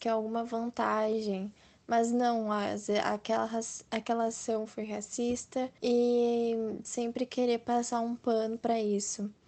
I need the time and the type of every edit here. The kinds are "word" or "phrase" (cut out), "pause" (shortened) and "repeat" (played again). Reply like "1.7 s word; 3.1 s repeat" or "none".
5.8 s pause